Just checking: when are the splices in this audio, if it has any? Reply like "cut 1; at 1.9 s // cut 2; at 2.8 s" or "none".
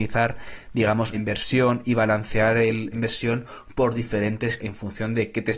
cut 1; at 1.1 s // cut 2; at 2.9 s // cut 3; at 4.6 s